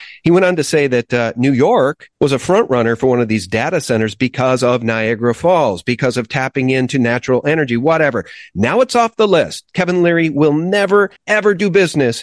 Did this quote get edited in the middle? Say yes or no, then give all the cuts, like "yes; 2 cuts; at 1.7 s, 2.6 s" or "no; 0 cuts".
yes; 2 cuts; at 2.1 s, 11.2 s